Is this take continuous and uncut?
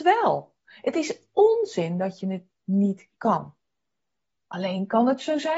yes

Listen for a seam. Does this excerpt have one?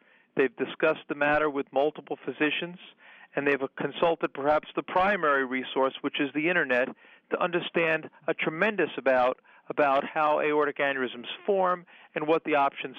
no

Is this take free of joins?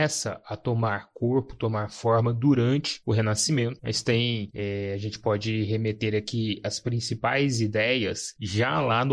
yes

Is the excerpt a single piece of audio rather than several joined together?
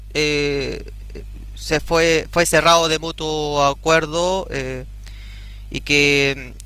yes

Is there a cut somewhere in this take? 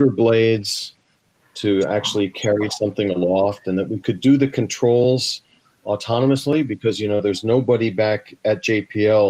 no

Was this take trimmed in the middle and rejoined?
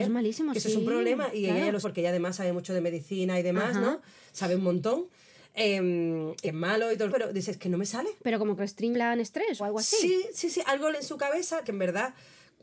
yes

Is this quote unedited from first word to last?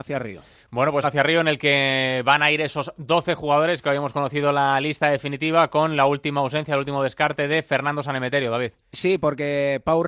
no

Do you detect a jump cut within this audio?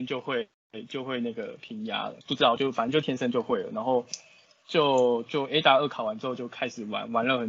yes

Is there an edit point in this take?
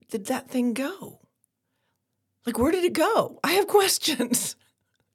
no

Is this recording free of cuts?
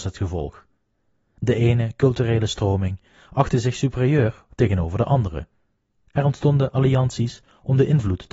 yes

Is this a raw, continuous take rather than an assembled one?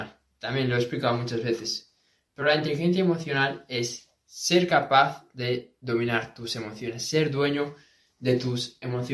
yes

